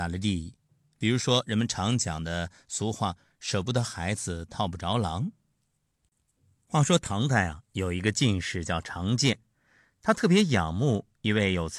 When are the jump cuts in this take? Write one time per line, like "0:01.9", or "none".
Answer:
none